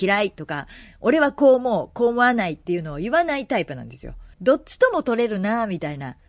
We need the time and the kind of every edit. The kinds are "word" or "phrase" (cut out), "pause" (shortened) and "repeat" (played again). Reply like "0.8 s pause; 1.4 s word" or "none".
4.3 s pause